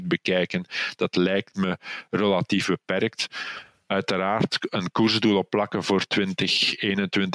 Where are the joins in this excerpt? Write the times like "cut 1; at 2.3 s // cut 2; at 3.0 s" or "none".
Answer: none